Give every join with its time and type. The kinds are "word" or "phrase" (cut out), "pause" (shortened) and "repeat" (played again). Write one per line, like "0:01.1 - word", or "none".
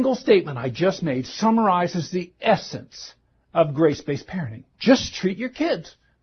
0:04.7 - pause